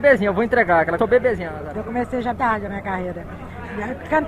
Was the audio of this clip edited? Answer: yes; 3 cuts; at 1.0 s, 1.7 s, 2.3 s

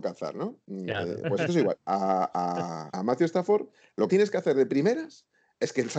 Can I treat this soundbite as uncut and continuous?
no; 3 cuts; at 1.2 s, 2.9 s, 4.1 s

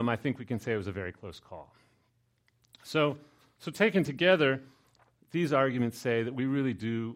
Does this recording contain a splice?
no; 0 cuts

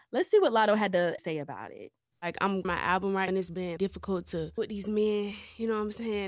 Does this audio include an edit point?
yes; 5 cuts; at 1.2 s, 2.6 s, 3.3 s, 3.8 s, 4.6 s

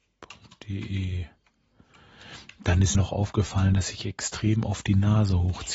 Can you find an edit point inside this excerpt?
yes; 1 cut; at 2.9 s

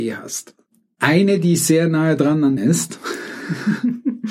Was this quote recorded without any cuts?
no; 1 cut; at 2.6 s

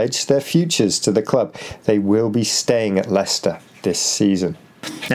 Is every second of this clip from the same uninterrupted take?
yes; 0 cuts

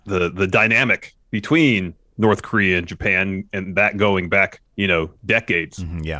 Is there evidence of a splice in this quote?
yes; 2 cuts; at 1.2 s, 4.7 s

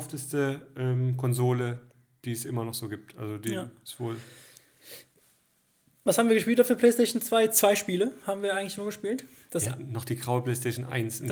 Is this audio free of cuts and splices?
yes; 0 cuts

